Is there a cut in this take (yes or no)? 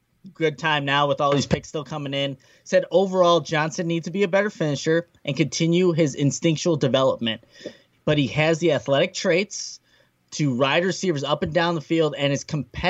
no